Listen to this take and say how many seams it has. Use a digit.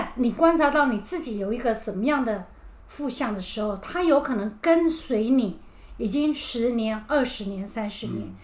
1